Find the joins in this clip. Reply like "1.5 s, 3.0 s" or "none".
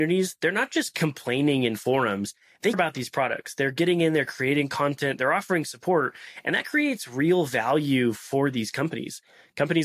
2.7 s